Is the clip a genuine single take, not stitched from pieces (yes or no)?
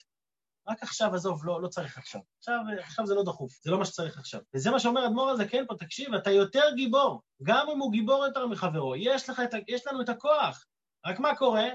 no